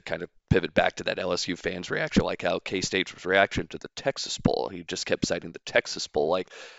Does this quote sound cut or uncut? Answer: uncut